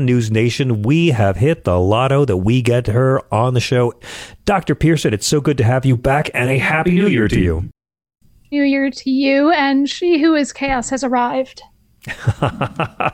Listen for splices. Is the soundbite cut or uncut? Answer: uncut